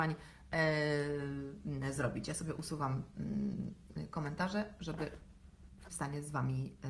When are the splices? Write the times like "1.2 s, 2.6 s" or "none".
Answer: 5.9 s